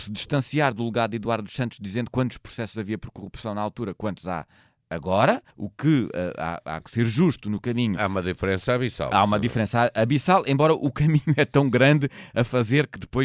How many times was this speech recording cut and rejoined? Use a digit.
1